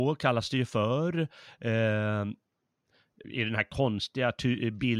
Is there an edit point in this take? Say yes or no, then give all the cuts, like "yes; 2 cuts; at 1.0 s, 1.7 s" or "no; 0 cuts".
yes; 1 cut; at 3.2 s